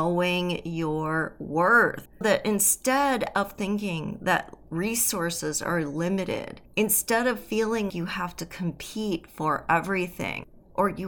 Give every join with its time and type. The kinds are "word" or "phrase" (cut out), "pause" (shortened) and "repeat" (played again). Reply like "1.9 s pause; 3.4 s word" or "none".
2.2 s word; 6.7 s pause; 7.9 s word

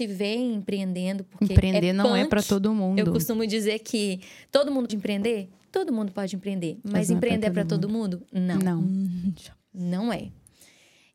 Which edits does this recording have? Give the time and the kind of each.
4.9 s word; 9.6 s pause

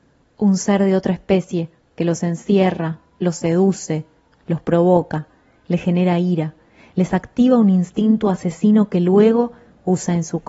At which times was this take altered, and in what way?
none

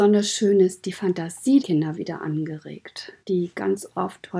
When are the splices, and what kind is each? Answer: 1.6 s word; 1.9 s word; 3.2 s pause

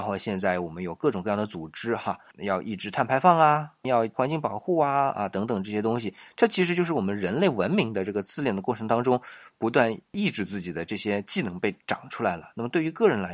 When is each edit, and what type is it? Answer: none

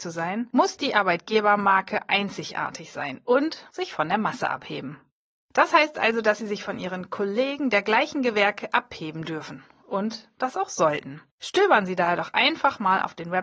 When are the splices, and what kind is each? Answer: none

